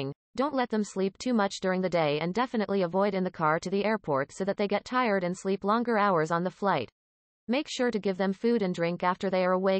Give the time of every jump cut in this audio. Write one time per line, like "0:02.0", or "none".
none

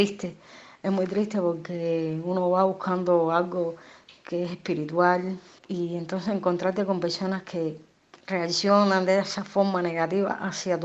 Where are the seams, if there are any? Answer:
none

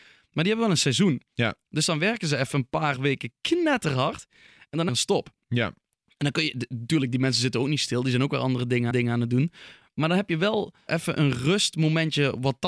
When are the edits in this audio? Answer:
0:04.9
0:08.9
0:10.9

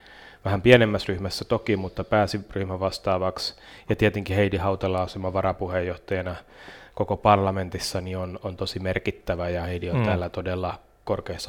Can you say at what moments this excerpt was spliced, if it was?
none

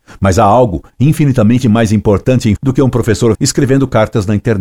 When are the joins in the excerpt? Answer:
0:02.6
0:03.3

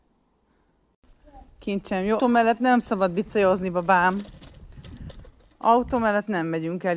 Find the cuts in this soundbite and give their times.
0:02.2

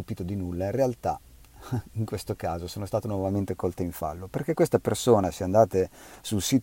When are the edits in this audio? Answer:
none

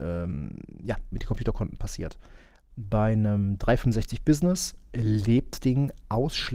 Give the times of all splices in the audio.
0:01.1
0:05.6

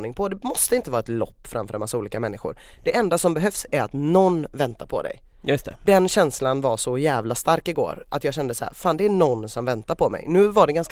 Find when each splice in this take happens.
none

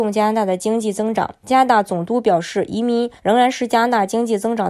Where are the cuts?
0:03.2

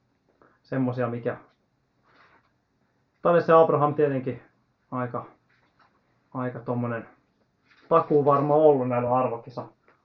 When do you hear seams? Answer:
none

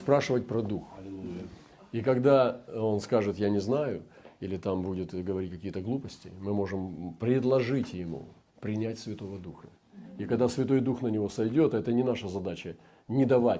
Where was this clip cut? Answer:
none

